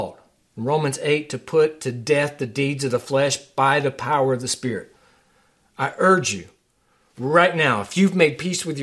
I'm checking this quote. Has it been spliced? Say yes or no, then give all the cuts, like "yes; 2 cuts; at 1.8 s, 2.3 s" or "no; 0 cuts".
no; 0 cuts